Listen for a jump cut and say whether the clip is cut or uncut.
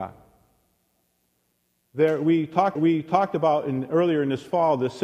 cut